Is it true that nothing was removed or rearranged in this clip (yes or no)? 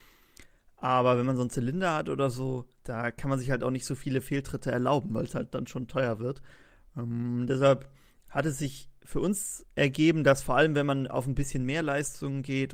yes